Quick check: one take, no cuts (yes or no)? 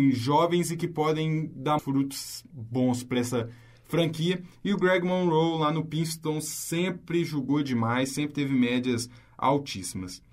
no